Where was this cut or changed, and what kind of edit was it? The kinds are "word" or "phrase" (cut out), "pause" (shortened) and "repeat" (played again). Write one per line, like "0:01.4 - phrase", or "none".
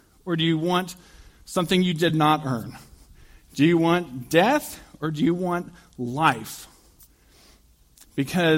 none